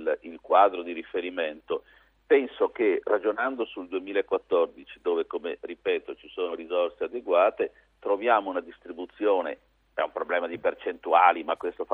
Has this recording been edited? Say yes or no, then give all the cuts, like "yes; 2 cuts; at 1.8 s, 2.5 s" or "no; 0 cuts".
no; 0 cuts